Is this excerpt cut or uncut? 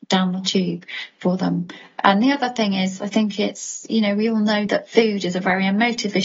uncut